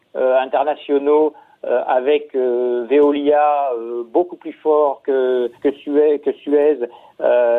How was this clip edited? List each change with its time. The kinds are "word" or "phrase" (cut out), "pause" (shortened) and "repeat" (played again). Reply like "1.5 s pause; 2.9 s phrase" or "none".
5.5 s pause